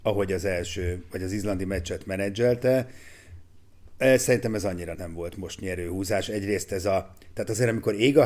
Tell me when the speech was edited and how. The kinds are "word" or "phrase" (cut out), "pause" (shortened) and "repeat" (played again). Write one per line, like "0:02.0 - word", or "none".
0:04.9 - word